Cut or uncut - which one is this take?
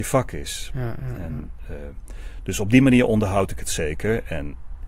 uncut